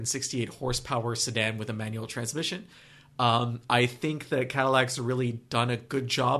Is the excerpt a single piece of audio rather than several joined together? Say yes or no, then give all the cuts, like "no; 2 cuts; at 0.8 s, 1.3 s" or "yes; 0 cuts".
yes; 0 cuts